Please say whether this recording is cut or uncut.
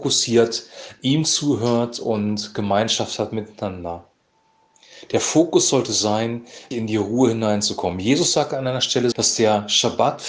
cut